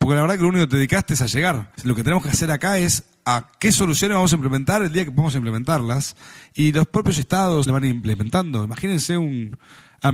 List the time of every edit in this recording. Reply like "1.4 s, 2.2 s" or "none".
1.8 s, 7.7 s